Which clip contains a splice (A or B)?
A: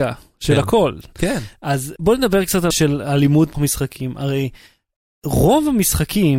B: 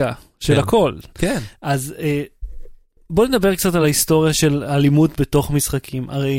A